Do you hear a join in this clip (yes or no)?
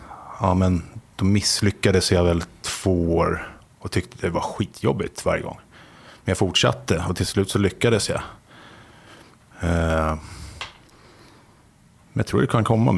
no